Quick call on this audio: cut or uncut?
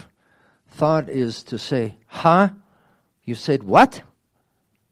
uncut